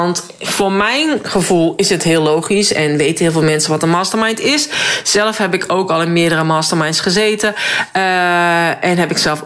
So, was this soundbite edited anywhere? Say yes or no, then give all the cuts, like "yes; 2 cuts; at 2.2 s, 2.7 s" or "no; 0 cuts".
no; 0 cuts